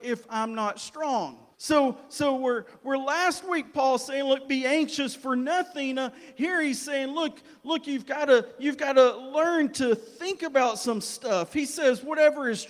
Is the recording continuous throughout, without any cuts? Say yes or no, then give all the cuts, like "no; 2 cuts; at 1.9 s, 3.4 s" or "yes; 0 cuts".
no; 1 cut; at 1.5 s